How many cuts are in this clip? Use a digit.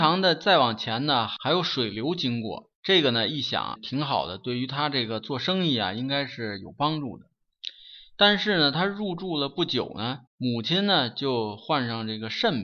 3